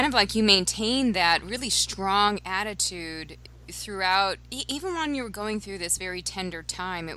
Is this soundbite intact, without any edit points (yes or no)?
yes